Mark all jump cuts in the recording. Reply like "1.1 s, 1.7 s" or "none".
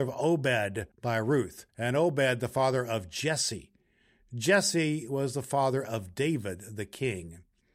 0.9 s, 1.7 s